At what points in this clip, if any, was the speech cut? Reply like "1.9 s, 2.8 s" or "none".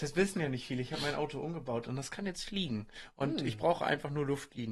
none